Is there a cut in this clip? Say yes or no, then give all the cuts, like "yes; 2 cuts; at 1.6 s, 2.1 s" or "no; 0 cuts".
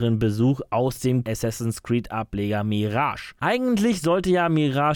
yes; 1 cut; at 1.2 s